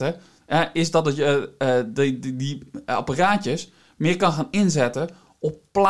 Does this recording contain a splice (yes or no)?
no